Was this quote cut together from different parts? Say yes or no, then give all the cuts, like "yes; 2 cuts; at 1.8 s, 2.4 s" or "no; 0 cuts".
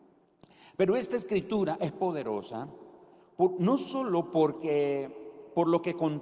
no; 0 cuts